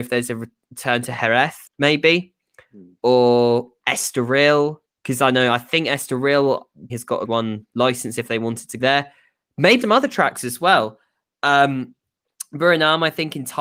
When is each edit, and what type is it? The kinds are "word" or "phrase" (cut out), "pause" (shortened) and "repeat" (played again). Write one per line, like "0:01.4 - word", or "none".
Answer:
0:01.7 - pause
0:04.8 - pause
0:06.9 - word
0:07.2 - phrase
0:08.8 - word
0:09.8 - word